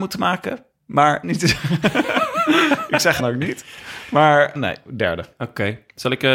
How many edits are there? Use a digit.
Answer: 3